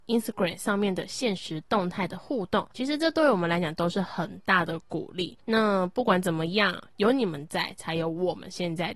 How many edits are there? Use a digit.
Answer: 2